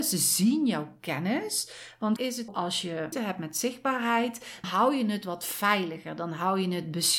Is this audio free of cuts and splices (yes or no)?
no